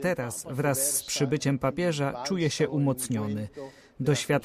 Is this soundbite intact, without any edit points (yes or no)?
yes